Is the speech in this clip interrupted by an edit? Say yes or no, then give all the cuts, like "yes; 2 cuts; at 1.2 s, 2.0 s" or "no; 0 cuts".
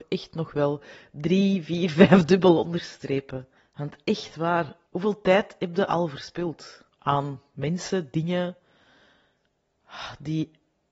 yes; 3 cuts; at 3.6 s, 4.8 s, 6.9 s